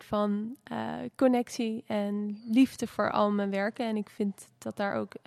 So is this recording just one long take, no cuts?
yes; 0 cuts

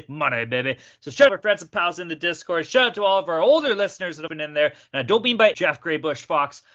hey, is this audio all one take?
no; 3 cuts; at 1.3 s, 4.3 s, 5.5 s

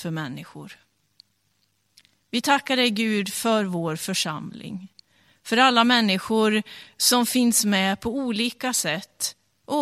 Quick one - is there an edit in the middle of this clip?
no; 0 cuts

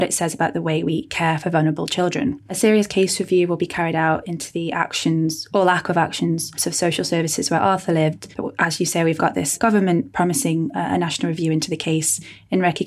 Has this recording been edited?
yes; 2 cuts; at 8.3 s, 9.2 s

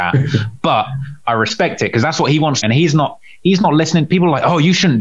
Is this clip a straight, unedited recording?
no; 1 cut; at 2.6 s

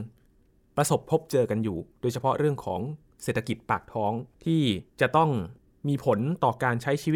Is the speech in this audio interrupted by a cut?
yes; 3 cuts; at 4.3 s, 4.9 s, 5.6 s

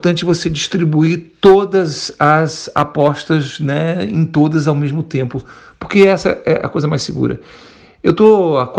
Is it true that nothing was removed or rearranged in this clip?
yes; 0 cuts

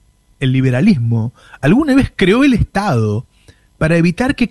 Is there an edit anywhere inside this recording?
no; 0 cuts

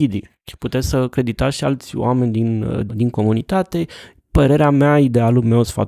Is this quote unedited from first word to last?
no; 1 cut; at 2.9 s

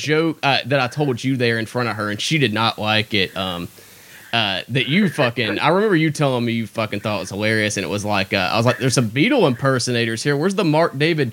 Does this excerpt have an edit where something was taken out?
no; 0 cuts

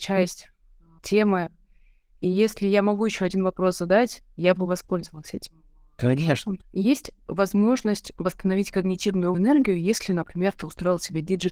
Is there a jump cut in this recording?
yes; 3 cuts; at 1.0 s, 6.6 s, 9.3 s

